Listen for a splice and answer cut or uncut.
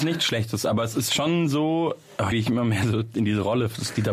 cut